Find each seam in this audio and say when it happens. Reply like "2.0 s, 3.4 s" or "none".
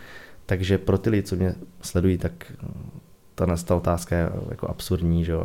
none

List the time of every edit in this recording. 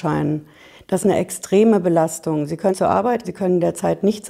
1.0 s, 2.7 s, 3.2 s

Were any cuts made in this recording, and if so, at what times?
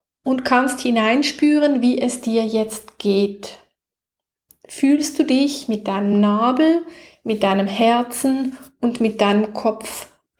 none

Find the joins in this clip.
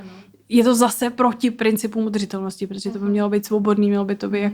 none

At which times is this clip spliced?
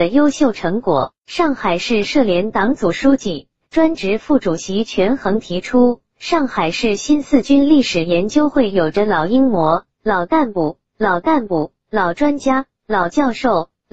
1.2 s, 10.9 s

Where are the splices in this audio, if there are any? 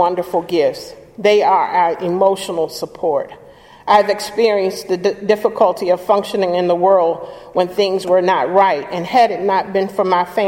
none

